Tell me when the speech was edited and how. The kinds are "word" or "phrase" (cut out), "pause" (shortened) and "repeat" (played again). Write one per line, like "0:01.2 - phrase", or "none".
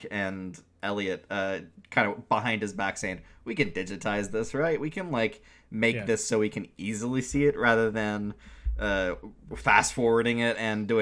none